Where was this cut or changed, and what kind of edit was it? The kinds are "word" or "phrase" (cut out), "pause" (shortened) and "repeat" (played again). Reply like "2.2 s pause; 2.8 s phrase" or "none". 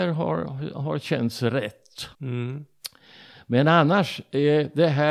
2.1 s pause